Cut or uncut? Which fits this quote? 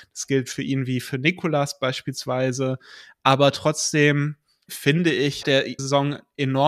cut